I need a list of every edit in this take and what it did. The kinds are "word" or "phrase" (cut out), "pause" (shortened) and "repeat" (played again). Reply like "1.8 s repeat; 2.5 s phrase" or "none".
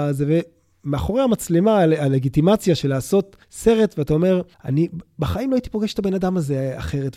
3.4 s pause; 4.5 s pause